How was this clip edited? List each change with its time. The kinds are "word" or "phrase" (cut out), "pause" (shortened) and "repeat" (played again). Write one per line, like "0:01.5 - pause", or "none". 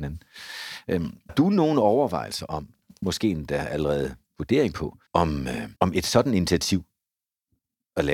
0:01.3 - word
0:05.1 - pause
0:05.8 - pause